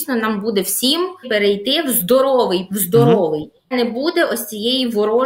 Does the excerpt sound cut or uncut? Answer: cut